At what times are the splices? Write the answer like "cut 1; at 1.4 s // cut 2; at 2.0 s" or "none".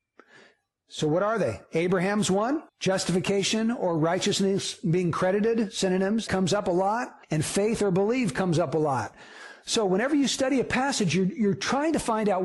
cut 1; at 2.7 s // cut 2; at 6.3 s // cut 3; at 7.2 s